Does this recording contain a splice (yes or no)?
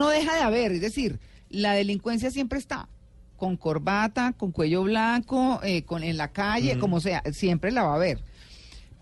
no